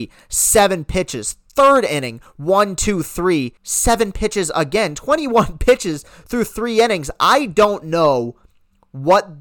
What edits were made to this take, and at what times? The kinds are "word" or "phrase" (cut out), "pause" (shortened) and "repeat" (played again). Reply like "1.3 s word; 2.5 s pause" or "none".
3.6 s pause